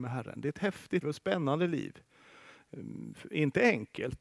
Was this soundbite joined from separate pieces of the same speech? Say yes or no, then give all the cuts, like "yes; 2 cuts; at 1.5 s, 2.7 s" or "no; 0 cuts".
yes; 1 cut; at 1.0 s